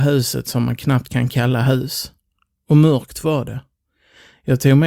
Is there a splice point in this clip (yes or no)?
no